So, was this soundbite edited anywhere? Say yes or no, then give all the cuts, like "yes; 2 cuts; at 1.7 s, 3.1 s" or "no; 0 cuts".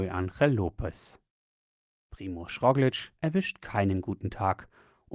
no; 0 cuts